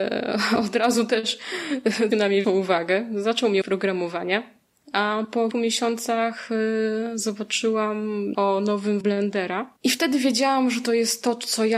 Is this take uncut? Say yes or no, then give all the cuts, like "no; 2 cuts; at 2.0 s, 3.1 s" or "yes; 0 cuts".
no; 7 cuts; at 2.1 s, 2.4 s, 3.6 s, 5.5 s, 8.3 s, 9.0 s, 9.8 s